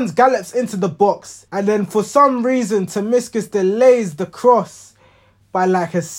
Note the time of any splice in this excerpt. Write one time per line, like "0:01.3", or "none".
0:01.5